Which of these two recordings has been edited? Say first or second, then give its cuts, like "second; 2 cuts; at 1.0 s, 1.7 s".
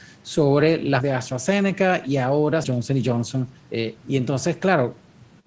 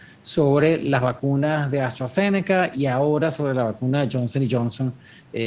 first; 3 cuts; at 1.0 s, 2.6 s, 3.6 s